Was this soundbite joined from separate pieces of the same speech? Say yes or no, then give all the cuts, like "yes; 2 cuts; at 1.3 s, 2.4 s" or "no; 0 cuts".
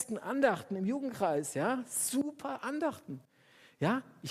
no; 0 cuts